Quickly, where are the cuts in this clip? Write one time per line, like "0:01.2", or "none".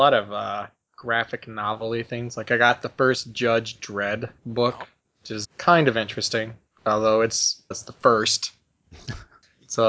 0:04.4
0:05.4
0:07.7